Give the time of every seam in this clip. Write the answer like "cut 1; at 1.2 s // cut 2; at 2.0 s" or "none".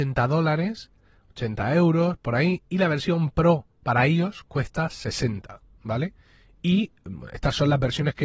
cut 1; at 3.7 s